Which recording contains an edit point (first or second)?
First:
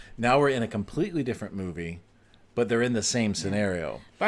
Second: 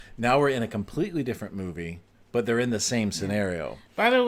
second